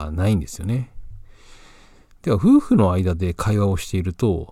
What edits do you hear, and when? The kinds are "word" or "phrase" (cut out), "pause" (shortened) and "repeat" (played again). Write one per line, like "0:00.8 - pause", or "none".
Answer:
none